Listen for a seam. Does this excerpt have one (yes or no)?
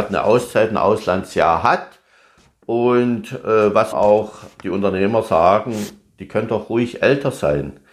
yes